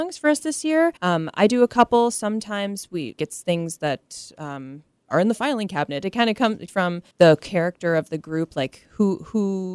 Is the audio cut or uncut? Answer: cut